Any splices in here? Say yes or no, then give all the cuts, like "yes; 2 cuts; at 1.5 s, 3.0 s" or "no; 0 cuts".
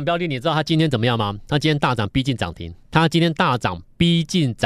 yes; 1 cut; at 2.8 s